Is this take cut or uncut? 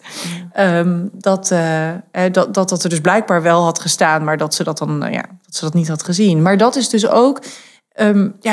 uncut